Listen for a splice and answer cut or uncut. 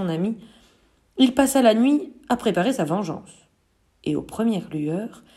cut